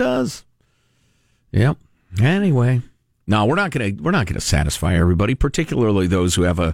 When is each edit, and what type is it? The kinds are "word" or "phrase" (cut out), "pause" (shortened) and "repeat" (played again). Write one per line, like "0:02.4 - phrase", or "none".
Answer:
none